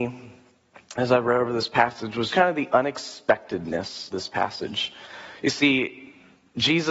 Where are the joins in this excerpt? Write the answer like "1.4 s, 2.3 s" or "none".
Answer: 2.3 s, 4.1 s